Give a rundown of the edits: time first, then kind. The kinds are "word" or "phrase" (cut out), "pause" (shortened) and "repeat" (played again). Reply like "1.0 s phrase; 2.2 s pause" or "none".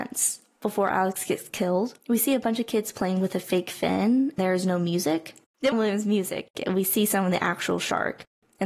2.0 s pause; 4.4 s word; 5.7 s phrase